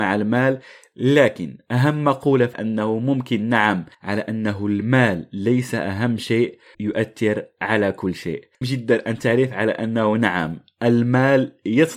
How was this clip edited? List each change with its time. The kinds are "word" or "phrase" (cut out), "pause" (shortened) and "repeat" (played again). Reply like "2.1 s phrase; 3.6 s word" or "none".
2.5 s phrase; 3.9 s pause; 6.7 s word; 8.6 s word